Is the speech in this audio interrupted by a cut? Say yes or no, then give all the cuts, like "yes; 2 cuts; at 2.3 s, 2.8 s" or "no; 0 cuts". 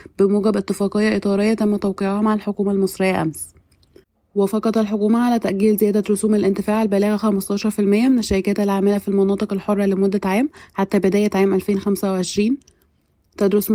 no; 0 cuts